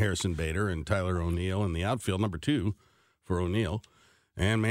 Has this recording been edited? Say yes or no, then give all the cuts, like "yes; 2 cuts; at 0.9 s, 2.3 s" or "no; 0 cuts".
no; 0 cuts